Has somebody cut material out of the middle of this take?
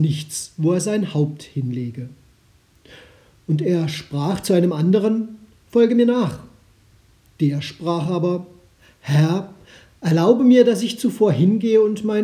no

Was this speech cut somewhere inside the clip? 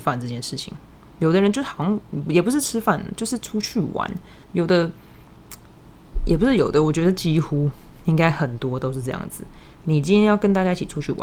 yes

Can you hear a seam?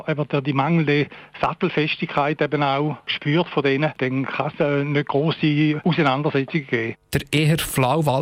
no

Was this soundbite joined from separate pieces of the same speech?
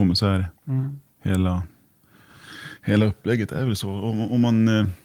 no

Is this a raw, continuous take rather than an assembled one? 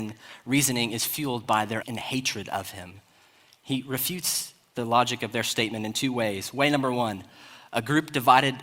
no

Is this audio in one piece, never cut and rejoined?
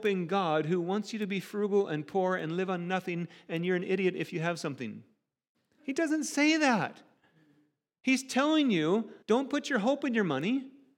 no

